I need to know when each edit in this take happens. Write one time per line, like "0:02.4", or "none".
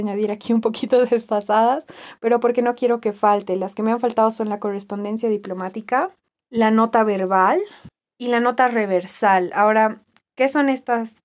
none